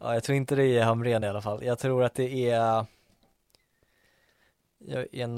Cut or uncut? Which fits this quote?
uncut